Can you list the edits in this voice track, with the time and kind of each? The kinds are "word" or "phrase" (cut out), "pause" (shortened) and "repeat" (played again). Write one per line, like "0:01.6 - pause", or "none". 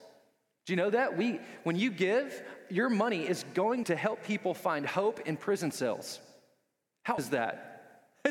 0:03.8 - word
0:07.2 - word